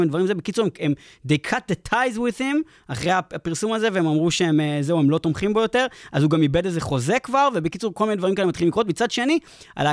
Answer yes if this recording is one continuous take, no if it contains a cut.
yes